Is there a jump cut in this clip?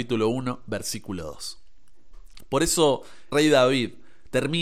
yes; 1 cut; at 3.3 s

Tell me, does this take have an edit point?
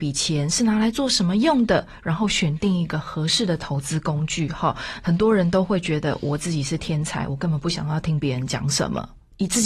no; 0 cuts

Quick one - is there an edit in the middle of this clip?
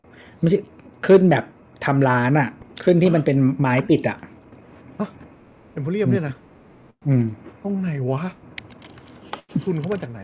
no; 0 cuts

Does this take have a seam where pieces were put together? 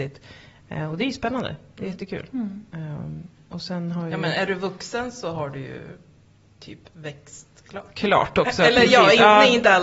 no; 0 cuts

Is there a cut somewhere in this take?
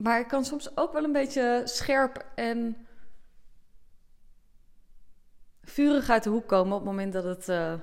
no; 0 cuts

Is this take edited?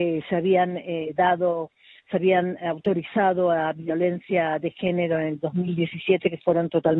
no; 0 cuts

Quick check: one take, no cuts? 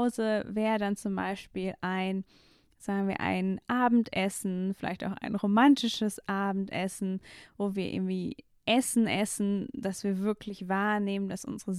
yes; 0 cuts

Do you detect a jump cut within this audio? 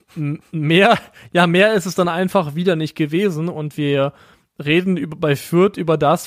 no; 0 cuts

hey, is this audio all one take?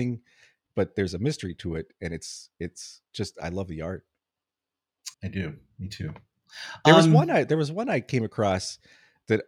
no; 2 cuts; at 3.1 s, 5.1 s

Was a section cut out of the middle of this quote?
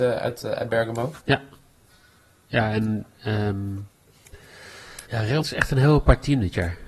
yes; 3 cuts; at 1.2 s, 5.1 s, 5.4 s

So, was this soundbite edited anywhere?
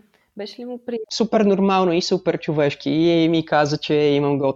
no; 0 cuts

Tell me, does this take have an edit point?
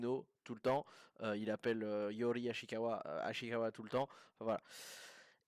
no; 0 cuts

